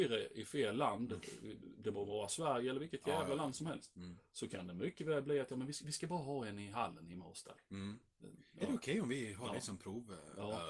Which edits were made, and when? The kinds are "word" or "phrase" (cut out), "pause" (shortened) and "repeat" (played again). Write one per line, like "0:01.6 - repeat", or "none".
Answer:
none